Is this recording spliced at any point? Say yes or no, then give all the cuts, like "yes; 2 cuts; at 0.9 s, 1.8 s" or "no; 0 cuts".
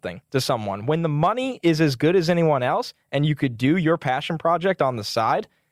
no; 0 cuts